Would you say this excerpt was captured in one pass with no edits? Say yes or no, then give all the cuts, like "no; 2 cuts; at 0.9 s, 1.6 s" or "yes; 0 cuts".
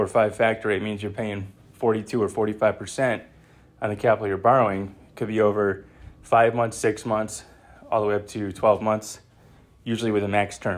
yes; 0 cuts